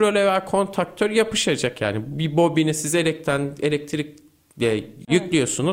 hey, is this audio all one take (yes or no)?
yes